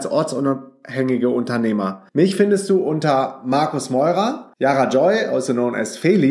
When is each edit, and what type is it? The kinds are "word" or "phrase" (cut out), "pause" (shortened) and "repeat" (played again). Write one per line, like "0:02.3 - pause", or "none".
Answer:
0:02.1 - pause
0:04.5 - pause